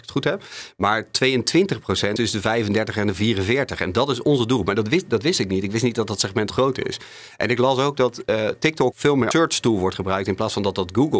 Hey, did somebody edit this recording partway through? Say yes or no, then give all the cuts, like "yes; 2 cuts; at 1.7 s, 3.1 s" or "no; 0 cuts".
yes; 4 cuts; at 2.2 s, 6.5 s, 8.9 s, 9.3 s